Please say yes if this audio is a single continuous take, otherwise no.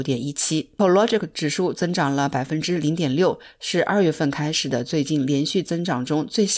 yes